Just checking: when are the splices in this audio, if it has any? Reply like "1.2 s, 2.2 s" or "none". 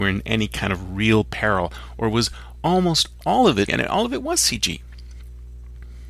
3.2 s, 3.7 s